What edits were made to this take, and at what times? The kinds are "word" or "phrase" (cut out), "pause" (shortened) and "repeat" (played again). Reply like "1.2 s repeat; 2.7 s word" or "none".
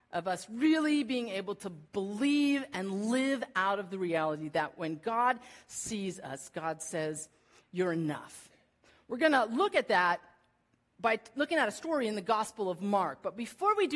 none